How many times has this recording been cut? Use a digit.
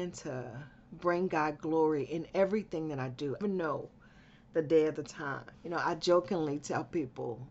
2